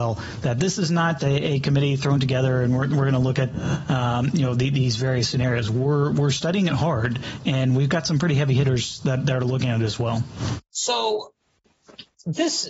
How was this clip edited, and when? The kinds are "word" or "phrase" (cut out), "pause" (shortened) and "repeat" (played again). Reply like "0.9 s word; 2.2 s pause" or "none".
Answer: 1.2 s word